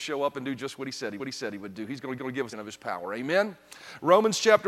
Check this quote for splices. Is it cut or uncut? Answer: cut